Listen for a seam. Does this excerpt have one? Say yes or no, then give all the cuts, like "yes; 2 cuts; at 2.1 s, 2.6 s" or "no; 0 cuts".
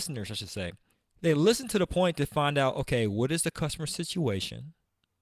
yes; 1 cut; at 0.9 s